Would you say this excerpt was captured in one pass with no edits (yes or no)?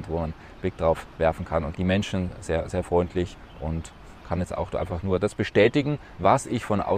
no